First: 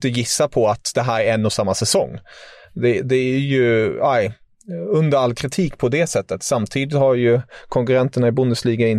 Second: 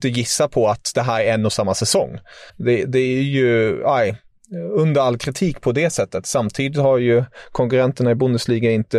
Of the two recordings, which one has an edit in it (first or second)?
second